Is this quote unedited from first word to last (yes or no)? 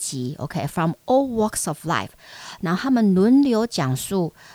yes